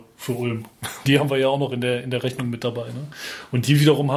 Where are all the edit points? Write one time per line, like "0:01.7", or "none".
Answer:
0:01.1